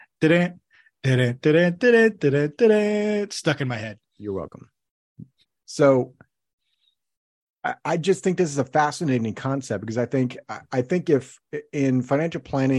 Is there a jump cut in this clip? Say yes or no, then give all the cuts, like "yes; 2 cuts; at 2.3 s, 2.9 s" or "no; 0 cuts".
yes; 1 cut; at 5.4 s